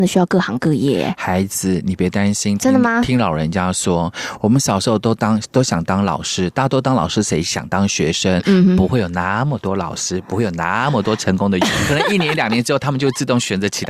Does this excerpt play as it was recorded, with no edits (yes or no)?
no